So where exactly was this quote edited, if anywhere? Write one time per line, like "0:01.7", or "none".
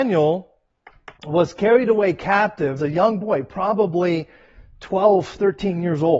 0:01.2
0:02.8

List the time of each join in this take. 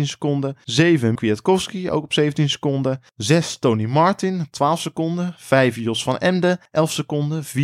0:01.2

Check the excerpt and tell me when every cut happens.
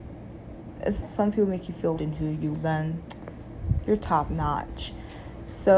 0:01.0
0:02.0
0:02.5

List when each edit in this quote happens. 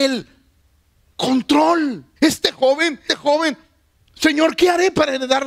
0:02.2
0:03.1

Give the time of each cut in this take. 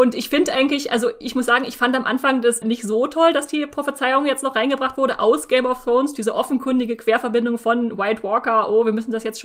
0:01.2
0:02.6

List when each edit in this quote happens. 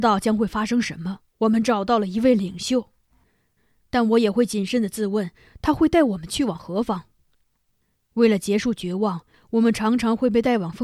0:01.3

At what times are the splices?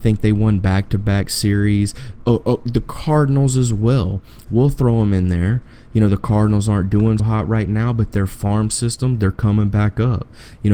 0:07.2

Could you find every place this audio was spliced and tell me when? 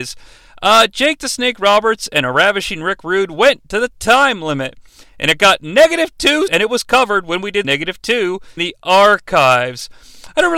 0:06.5
0:07.6
0:08.6

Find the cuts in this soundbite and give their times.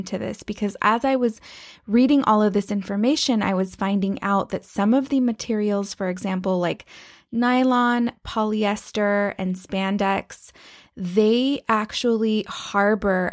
none

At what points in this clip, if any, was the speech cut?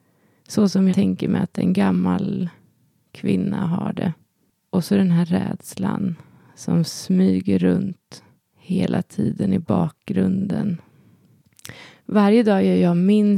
0:00.9

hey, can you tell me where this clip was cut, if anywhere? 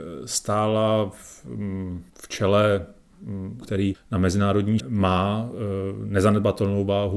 0:02.1
0:03.6
0:03.9
0:04.8

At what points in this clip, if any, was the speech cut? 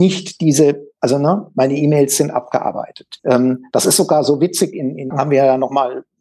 0:03.2
0:05.1

